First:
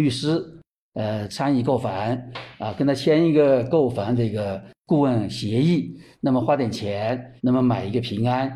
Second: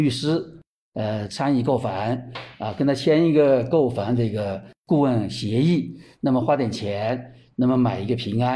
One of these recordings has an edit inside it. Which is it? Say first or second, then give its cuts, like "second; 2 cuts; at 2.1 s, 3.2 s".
first; 1 cut; at 7.4 s